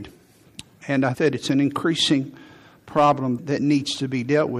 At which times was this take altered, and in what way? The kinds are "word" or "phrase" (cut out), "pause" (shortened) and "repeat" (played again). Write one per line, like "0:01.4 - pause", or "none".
0:01.1 - word
0:03.4 - word